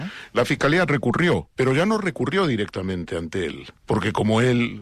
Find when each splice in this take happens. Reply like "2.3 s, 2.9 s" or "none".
1.5 s, 3.8 s

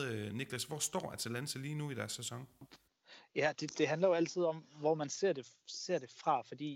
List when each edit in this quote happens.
none

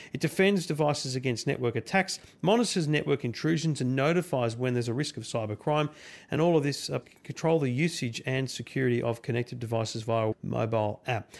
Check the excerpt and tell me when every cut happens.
7.0 s, 10.3 s

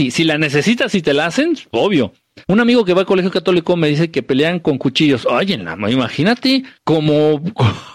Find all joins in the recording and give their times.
2.4 s, 6.8 s

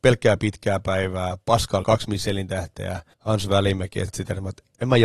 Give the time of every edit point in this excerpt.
1.8 s, 3.1 s, 4.1 s

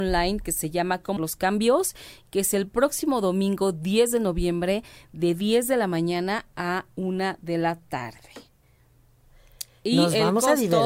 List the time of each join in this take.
1.2 s

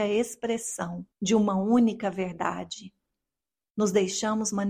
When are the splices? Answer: 1.1 s

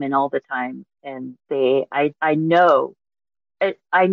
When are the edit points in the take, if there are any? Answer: 1.4 s, 2.1 s

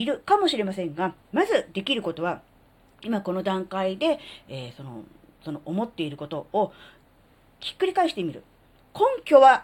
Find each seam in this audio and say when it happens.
1.2 s

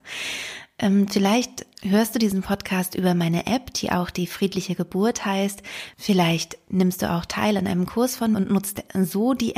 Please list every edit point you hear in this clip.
8.3 s

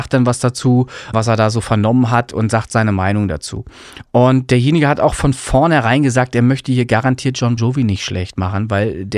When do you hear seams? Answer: 1.1 s, 7.6 s

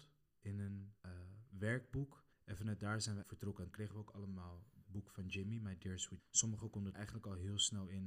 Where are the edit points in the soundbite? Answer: 1.0 s, 2.3 s, 3.2 s, 3.7 s, 4.8 s, 6.2 s, 6.9 s

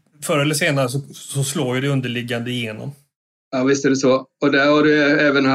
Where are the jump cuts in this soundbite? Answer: none

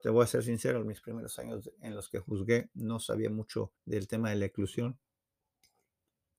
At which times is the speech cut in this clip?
3.8 s

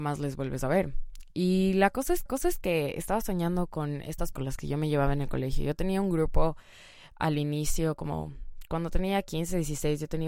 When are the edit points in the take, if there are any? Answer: 2.3 s, 4.3 s

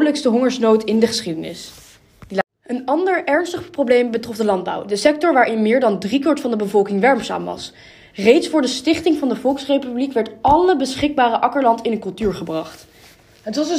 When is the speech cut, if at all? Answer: none

